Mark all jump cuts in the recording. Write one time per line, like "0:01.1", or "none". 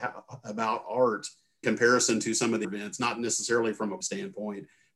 0:01.6
0:02.6
0:04.0